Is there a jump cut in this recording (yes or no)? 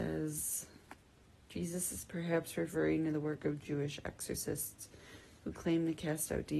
no